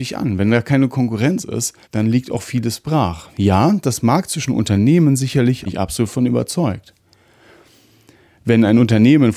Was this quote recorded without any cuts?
no; 2 cuts; at 1.8 s, 5.7 s

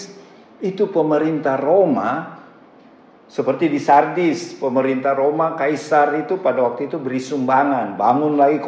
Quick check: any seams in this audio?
no; 0 cuts

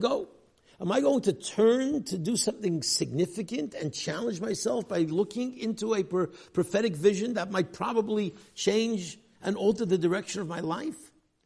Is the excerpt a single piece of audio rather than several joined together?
yes; 0 cuts

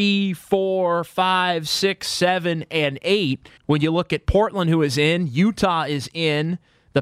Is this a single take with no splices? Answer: no; 1 cut; at 3.6 s

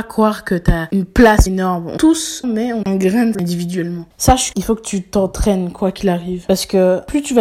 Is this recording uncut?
no; 6 cuts; at 1.5 s, 2.0 s, 2.4 s, 2.8 s, 3.3 s, 4.5 s

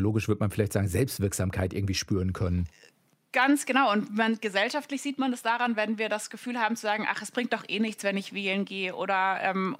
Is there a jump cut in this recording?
no; 0 cuts

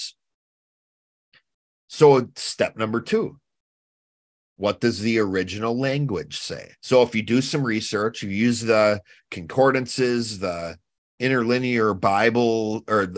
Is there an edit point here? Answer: yes; 1 cut; at 6.8 s

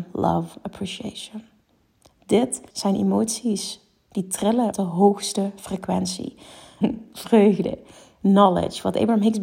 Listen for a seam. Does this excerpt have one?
yes; 3 cuts; at 2.7 s, 4.7 s, 6.8 s

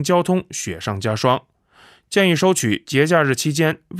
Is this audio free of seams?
yes; 0 cuts

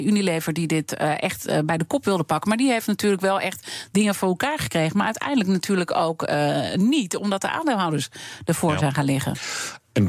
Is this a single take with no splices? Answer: yes; 0 cuts

